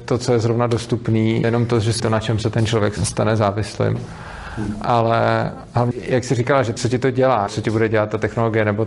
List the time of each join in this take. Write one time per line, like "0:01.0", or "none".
0:01.4
0:02.0
0:03.0
0:05.9
0:06.8
0:07.5